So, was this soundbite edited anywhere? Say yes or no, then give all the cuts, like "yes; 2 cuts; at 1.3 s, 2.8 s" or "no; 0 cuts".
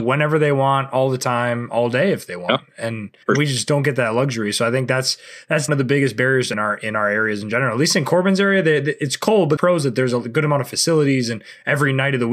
yes; 4 cuts; at 3.2 s, 5.7 s, 6.5 s, 9.6 s